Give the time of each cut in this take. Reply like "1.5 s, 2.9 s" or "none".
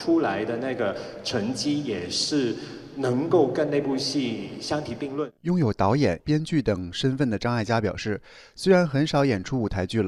6.2 s